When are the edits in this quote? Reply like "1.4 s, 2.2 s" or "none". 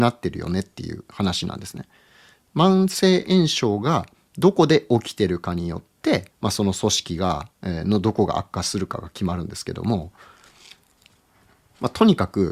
6.3 s, 7.5 s